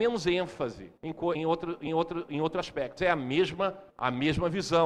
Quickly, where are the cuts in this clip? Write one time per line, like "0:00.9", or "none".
0:01.0
0:01.3
0:01.9
0:03.0
0:03.9